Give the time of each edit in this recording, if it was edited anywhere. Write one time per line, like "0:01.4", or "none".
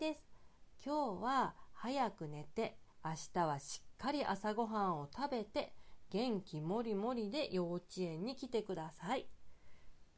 0:02.9